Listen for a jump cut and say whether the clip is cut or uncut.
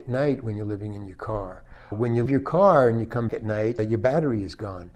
cut